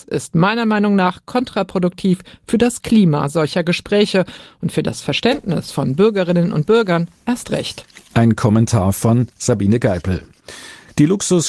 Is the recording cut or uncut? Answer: uncut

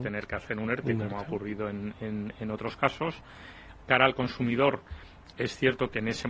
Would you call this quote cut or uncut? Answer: uncut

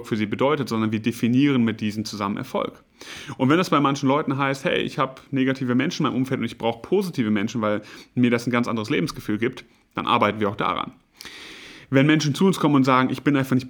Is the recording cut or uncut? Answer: uncut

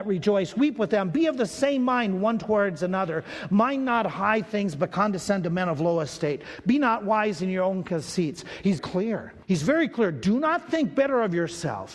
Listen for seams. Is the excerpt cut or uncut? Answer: cut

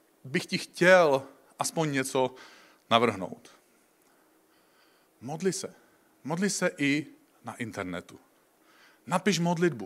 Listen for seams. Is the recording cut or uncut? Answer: uncut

